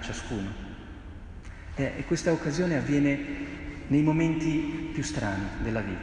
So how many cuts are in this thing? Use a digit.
0